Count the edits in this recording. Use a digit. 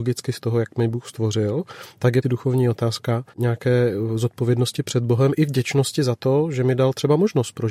2